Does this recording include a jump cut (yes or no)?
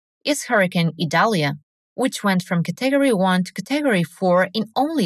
no